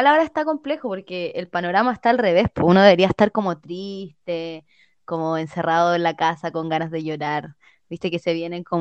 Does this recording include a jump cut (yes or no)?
no